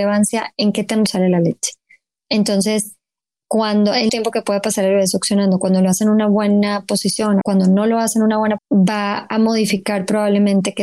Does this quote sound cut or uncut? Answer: cut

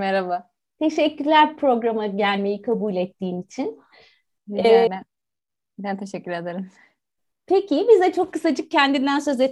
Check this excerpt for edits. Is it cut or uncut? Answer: cut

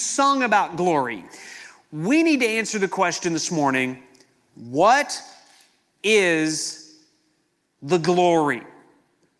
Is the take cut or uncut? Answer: uncut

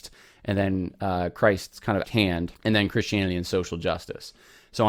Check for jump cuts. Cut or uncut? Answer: cut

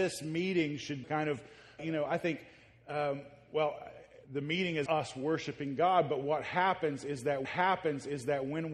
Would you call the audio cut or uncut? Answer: cut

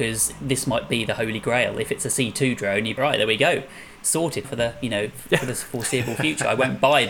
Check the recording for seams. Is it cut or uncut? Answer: cut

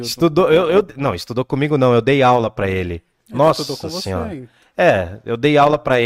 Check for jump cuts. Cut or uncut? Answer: uncut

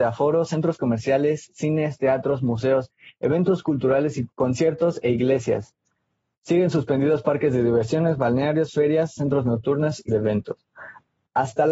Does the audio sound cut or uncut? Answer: cut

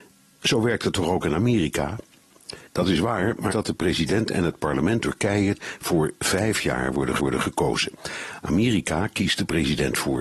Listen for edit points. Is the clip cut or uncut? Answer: cut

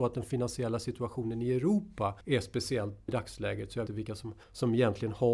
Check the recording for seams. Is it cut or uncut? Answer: cut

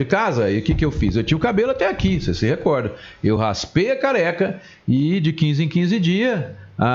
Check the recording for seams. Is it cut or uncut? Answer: uncut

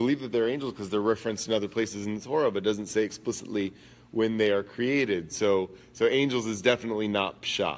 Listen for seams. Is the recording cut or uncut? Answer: uncut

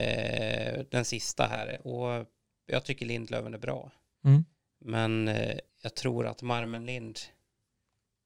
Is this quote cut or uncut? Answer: cut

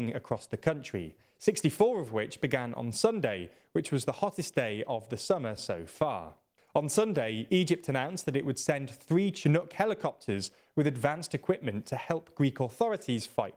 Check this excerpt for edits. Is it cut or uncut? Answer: uncut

